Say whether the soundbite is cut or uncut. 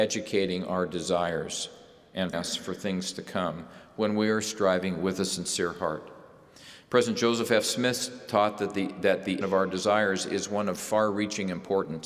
cut